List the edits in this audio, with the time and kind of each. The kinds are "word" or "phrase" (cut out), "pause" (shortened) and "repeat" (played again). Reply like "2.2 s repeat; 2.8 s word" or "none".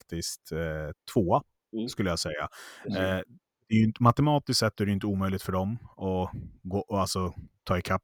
none